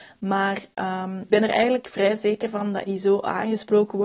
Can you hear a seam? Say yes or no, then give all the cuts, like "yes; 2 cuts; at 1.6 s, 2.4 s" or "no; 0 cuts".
yes; 2 cuts; at 1.3 s, 2.8 s